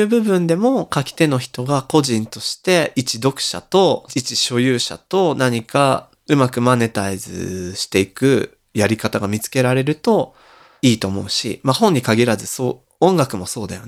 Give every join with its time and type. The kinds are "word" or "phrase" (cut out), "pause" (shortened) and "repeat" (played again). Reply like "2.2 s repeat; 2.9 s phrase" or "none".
none